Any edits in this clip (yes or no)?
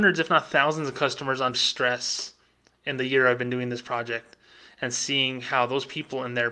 yes